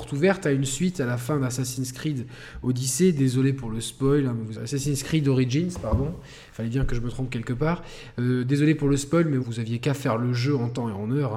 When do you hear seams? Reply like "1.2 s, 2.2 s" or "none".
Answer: 4.5 s, 9.4 s